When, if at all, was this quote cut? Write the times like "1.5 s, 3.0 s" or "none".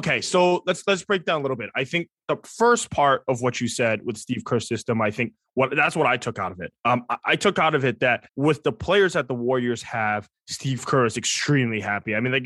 6.8 s, 8.3 s